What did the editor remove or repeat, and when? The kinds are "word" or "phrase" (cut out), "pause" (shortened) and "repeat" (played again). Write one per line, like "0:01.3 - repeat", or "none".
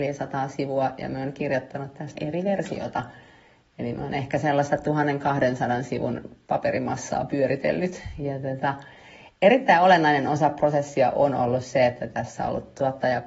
0:02.2 - word